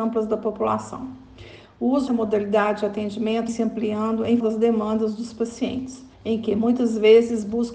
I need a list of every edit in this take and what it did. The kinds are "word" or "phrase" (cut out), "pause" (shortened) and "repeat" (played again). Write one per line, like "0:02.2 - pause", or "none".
0:02.1 - word
0:03.5 - word
0:04.4 - word
0:06.1 - pause